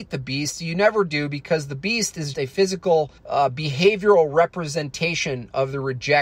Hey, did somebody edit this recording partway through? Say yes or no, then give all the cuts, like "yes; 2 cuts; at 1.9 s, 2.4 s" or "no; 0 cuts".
yes; 2 cuts; at 2.3 s, 3.2 s